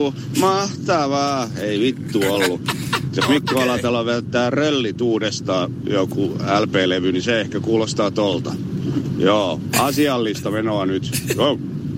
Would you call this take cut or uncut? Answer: uncut